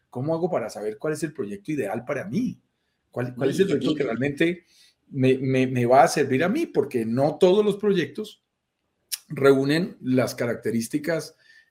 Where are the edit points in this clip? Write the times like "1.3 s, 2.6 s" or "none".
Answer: none